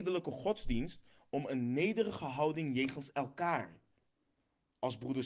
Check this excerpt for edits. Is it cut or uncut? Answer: uncut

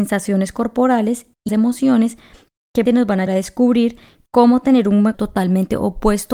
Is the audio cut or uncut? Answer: cut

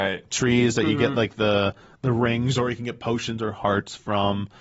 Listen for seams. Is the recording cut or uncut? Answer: uncut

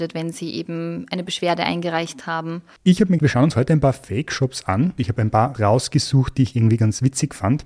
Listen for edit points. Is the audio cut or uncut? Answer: cut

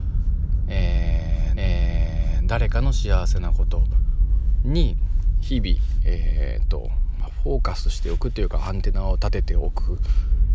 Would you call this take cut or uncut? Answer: cut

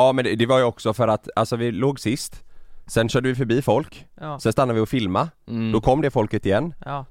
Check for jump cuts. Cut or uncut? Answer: uncut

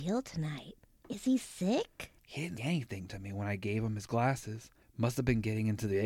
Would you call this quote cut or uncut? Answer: cut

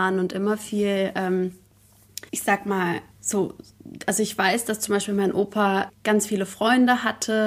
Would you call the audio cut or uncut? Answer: cut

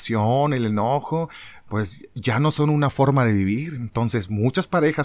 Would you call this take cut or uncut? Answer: uncut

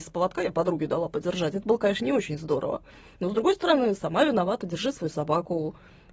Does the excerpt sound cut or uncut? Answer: uncut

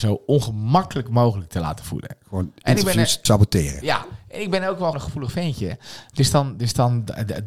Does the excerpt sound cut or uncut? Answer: cut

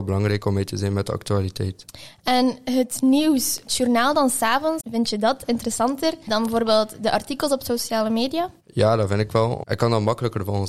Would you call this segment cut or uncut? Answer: cut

